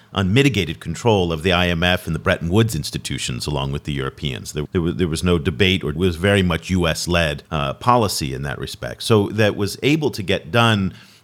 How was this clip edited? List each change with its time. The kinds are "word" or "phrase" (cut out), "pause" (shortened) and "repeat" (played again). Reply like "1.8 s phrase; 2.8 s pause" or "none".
4.7 s word; 6.0 s phrase; 7.5 s pause